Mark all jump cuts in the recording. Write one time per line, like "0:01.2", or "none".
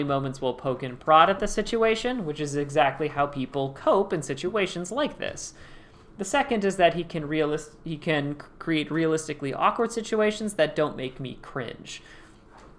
none